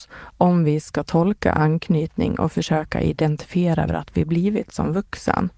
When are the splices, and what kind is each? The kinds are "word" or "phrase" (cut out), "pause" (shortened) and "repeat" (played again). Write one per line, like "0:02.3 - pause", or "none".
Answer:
0:03.9 - phrase